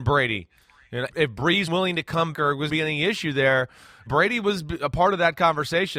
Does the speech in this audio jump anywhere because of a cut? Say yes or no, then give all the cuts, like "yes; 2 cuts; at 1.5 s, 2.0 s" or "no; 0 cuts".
yes; 5 cuts; at 1.1 s, 1.7 s, 2.3 s, 2.7 s, 4.1 s